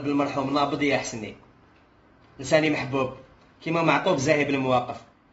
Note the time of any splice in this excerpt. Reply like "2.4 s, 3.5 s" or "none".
none